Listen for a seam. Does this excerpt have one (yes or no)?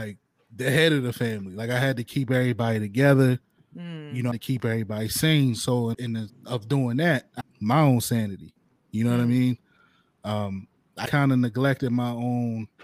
yes